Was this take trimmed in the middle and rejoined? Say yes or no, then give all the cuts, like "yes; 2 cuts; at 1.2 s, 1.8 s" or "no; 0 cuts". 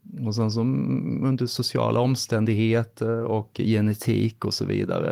no; 0 cuts